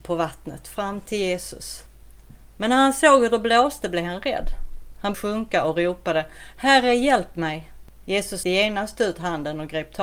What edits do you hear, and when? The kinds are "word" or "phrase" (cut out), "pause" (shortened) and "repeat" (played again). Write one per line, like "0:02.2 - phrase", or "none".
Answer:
0:05.1 - word
0:08.4 - word